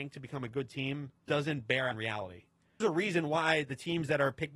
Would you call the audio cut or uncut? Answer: cut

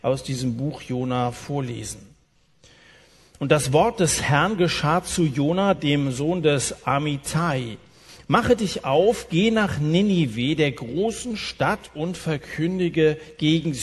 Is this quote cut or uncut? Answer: uncut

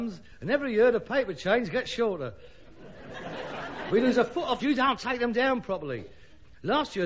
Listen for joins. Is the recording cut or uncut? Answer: cut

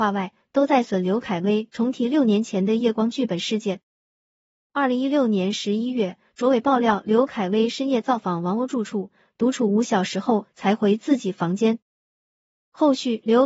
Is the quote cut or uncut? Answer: uncut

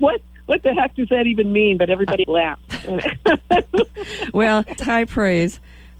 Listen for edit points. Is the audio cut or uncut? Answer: cut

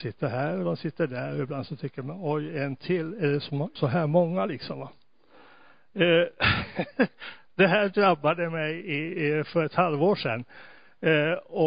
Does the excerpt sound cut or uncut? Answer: cut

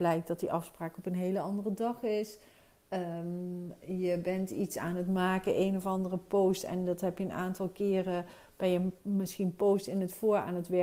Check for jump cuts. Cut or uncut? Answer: uncut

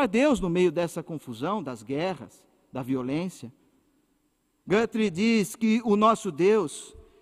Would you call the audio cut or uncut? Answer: uncut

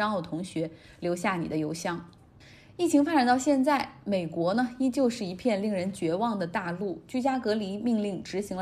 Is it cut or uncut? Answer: uncut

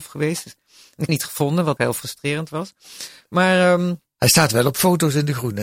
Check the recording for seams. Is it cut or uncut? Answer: cut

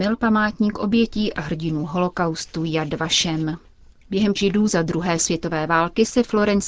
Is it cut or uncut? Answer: cut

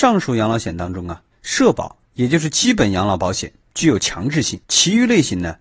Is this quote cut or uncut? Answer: cut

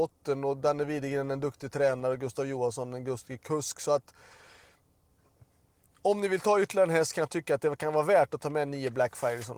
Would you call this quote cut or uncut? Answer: uncut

